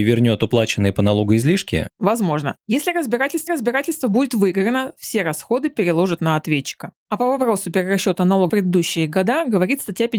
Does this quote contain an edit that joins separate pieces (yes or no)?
yes